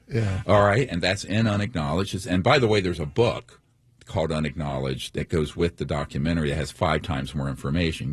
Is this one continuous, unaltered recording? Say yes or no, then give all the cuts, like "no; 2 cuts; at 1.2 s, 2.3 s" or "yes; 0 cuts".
yes; 0 cuts